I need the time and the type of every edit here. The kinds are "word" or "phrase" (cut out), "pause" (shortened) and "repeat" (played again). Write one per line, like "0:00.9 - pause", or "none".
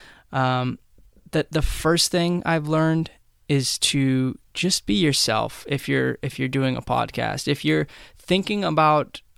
none